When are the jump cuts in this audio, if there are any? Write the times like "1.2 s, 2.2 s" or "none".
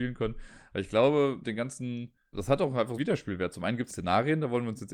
1.4 s, 2.3 s, 3.0 s, 3.9 s